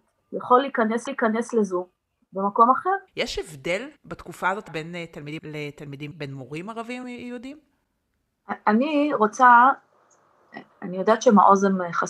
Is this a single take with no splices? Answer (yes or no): no